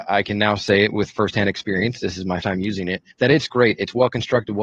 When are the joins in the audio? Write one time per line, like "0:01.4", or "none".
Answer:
0:02.4
0:03.1

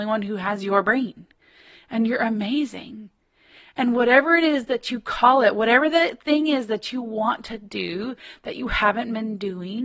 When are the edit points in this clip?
none

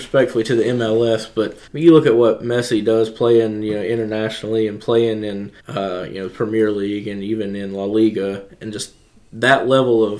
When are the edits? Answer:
0:01.7
0:05.6

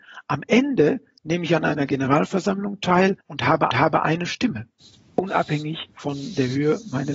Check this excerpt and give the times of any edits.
0:03.2
0:03.7
0:05.9

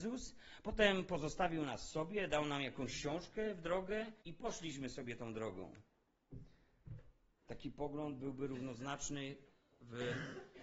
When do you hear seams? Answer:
0:04.2

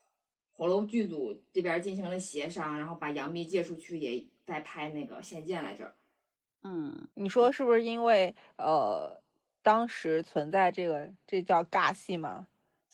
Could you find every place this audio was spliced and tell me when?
0:07.1

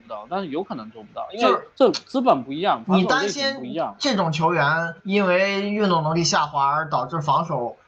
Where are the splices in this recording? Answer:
0:01.7
0:05.0

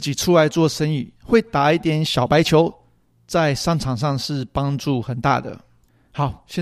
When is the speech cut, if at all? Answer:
0:01.2

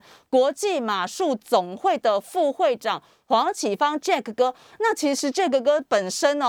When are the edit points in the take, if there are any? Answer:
none

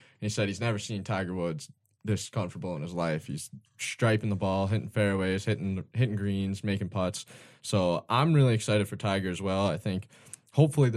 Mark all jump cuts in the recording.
none

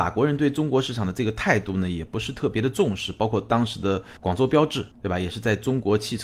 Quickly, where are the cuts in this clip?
0:04.2
0:04.9

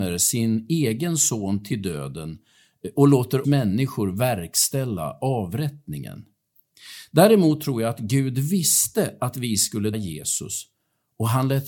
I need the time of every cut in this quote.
0:03.4
0:09.9

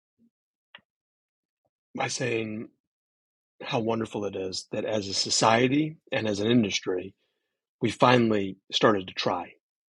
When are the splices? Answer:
none

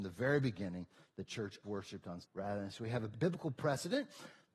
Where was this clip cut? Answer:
0:01.6
0:02.2
0:02.7
0:03.1

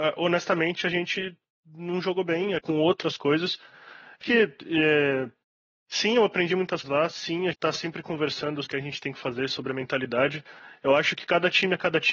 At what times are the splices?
0:02.6
0:04.2
0:05.4
0:06.8
0:07.5
0:08.7

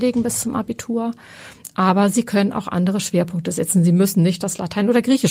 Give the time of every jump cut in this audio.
none

